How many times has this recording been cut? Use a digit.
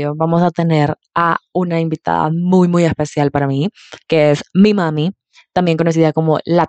0